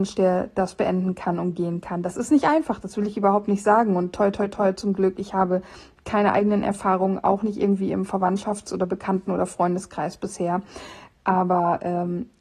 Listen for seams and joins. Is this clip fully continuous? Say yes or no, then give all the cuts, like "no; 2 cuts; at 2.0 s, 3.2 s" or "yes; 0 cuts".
yes; 0 cuts